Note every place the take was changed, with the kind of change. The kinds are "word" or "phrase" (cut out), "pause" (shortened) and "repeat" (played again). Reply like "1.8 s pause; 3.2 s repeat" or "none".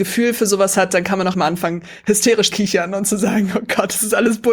1.3 s word; 2.5 s word